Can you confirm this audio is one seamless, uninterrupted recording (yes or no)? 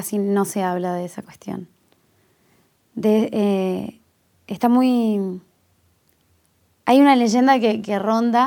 yes